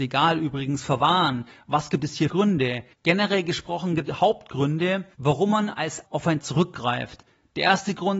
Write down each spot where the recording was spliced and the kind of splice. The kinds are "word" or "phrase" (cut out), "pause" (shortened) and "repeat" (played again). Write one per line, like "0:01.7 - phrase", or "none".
0:02.3 - word
0:02.9 - pause
0:04.1 - phrase
0:05.1 - pause
0:06.0 - word
0:06.4 - word

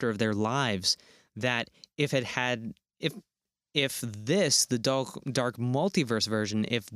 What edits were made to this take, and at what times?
none

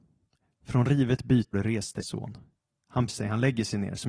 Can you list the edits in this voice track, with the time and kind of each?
0:01.5 - word
0:02.0 - word
0:03.1 - word

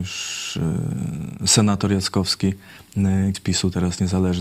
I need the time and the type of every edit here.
0:03.3 - word

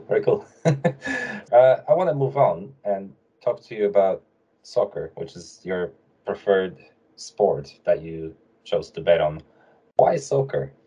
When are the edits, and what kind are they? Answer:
0:01.4 - word

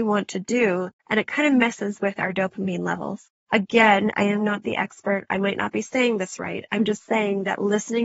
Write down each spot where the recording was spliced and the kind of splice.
0:01.0 - pause
0:03.4 - pause

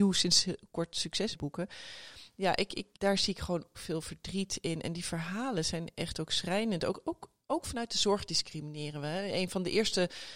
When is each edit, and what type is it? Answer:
0:01.3 - word
0:02.9 - pause
0:03.7 - word

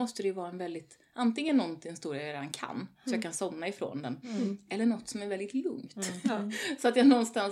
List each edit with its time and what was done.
none

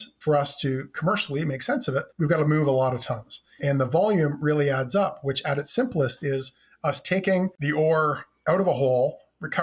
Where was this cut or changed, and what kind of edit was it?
0:02.1 - pause

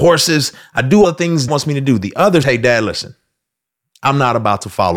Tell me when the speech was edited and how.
0:01.0 - word
0:01.5 - word
0:02.4 - phrase

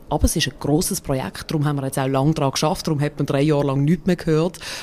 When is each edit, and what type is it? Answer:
none

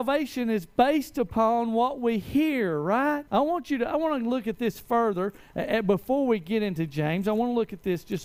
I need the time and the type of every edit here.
0:03.3 - pause

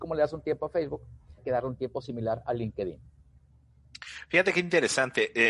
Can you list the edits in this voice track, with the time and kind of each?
0:01.4 - word

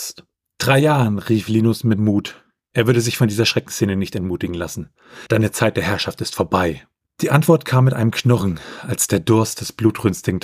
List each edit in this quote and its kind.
none

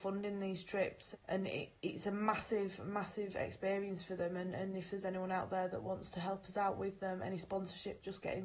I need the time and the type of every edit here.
0:01.1 - word

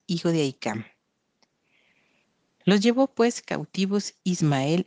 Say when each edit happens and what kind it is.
none

